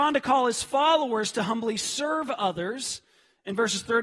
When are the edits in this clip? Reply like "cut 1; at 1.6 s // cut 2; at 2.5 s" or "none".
none